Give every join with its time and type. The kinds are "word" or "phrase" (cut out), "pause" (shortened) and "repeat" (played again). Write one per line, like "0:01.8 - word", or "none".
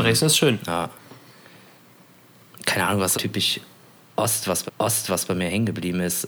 0:03.1 - word
0:04.7 - repeat